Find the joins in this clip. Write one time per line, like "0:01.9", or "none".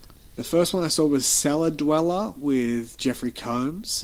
none